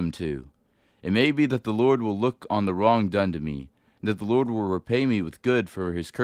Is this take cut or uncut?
uncut